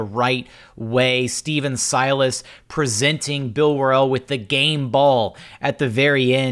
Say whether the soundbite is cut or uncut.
uncut